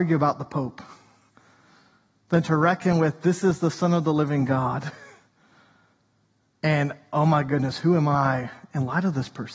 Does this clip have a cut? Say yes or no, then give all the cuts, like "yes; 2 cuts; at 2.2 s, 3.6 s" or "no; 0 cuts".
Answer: no; 0 cuts